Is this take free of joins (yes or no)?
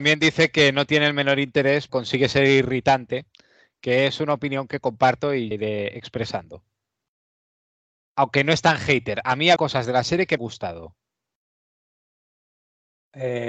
no